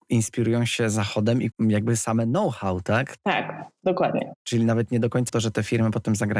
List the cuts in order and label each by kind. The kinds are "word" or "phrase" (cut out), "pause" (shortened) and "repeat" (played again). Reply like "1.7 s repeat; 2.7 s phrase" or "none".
1.5 s word; 5.3 s phrase